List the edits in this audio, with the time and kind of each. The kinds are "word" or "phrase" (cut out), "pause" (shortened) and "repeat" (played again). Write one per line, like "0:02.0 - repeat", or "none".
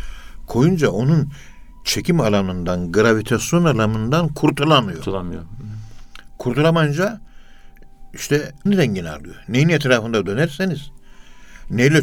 0:08.7 - word

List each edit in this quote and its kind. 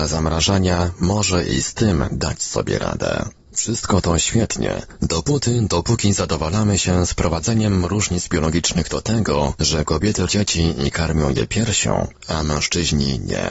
0:10.3 - word

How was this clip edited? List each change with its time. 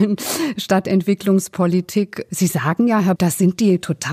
0:03.2 - word

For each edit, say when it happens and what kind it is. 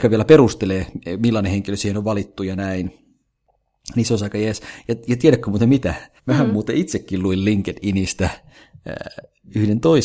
0:06.2 - pause

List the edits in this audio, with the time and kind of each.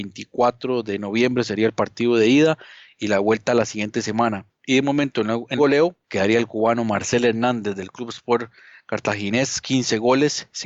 0:04.5 - pause
0:05.6 - word
0:09.6 - word

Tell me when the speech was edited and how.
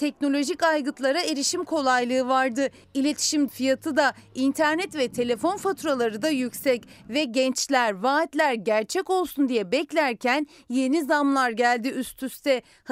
0:03.5 - word

